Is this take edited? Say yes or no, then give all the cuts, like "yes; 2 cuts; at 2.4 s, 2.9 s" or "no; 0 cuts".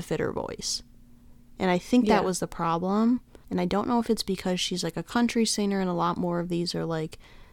yes; 1 cut; at 3.4 s